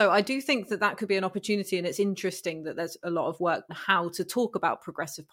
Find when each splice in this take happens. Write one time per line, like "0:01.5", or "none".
0:03.7